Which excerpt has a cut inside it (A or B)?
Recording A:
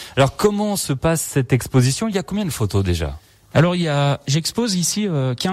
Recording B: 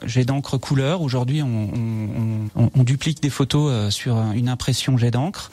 B